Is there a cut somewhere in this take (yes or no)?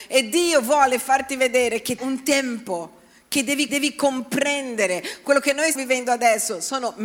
yes